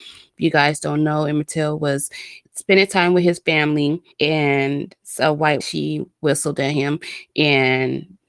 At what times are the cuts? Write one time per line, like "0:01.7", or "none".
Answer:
0:02.5
0:04.1
0:05.6